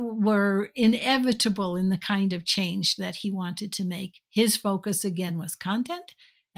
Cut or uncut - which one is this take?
uncut